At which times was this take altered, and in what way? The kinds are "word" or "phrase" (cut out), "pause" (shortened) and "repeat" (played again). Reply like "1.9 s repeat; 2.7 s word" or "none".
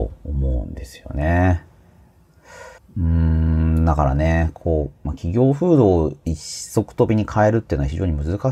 2.8 s pause